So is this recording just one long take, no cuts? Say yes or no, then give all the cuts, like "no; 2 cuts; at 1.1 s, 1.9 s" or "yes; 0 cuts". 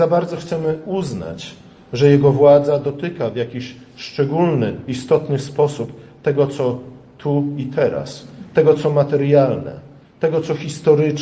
yes; 0 cuts